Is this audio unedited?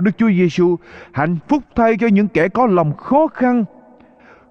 yes; 0 cuts

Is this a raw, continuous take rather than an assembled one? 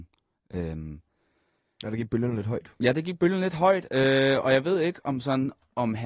yes; 0 cuts

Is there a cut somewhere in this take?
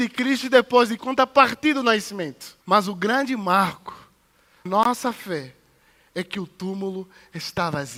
yes; 3 cuts; at 1.0 s, 2.6 s, 4.7 s

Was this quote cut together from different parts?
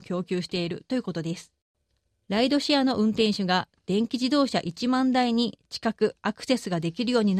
no; 0 cuts

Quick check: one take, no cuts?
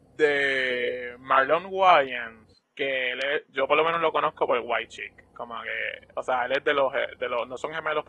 yes; 0 cuts

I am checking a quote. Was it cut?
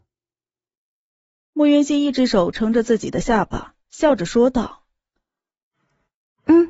yes; 1 cut; at 3.8 s

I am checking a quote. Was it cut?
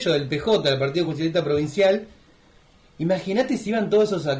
no; 0 cuts

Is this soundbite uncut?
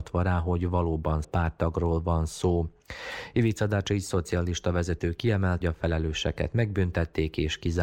no; 2 cuts; at 1.2 s, 5.6 s

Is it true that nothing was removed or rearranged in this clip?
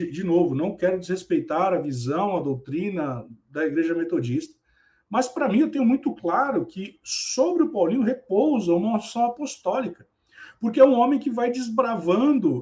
yes; 0 cuts

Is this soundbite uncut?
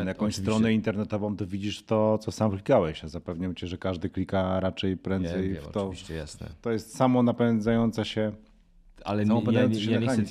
yes; 0 cuts

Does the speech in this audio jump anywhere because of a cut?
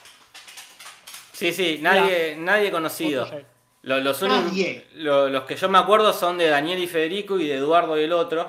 no; 0 cuts

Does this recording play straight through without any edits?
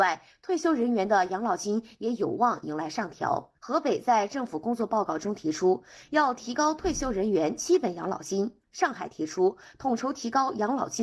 no; 2 cuts; at 3.6 s, 8.6 s

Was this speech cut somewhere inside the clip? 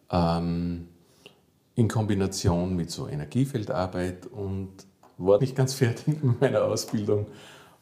yes; 1 cut; at 5.4 s

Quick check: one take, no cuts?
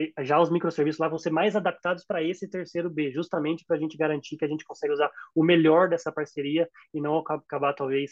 yes; 0 cuts

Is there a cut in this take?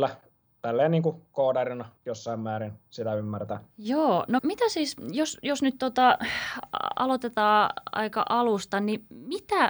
yes; 3 cuts; at 2.0 s, 3.7 s, 4.4 s

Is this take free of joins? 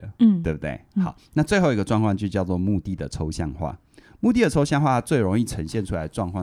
yes; 0 cuts

